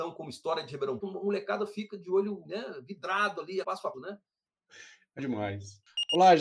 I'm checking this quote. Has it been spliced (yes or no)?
yes